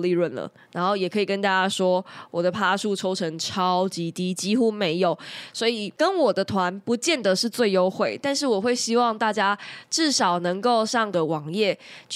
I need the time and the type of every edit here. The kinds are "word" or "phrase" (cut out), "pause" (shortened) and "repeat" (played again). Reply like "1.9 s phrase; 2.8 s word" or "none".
11.1 s word